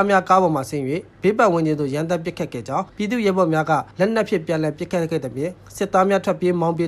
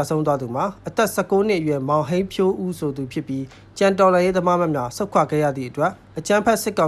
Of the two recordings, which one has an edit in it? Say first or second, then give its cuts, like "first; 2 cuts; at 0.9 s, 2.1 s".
first; 2 cuts; at 2.9 s, 3.9 s